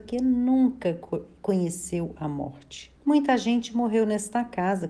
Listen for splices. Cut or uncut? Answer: cut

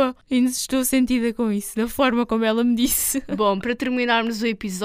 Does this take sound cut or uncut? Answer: uncut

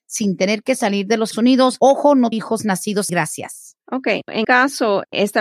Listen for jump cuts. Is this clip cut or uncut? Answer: cut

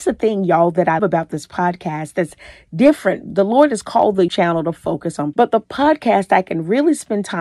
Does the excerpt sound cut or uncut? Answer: cut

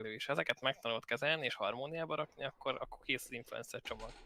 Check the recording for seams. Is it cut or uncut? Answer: uncut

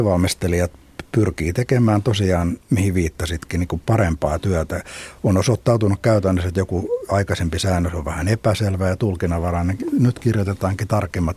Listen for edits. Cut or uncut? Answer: cut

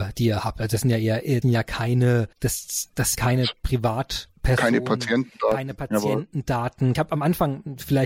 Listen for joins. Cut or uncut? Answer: cut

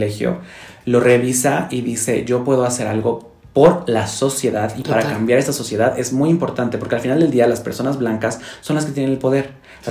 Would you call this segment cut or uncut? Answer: uncut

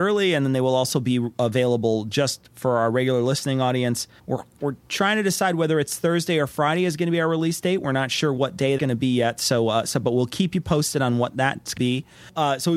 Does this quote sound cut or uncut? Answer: cut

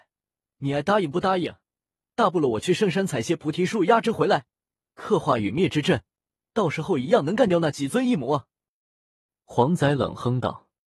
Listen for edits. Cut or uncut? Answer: uncut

